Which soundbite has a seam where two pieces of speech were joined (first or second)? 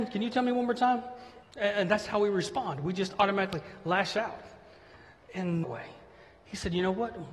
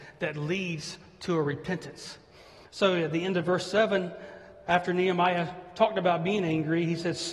first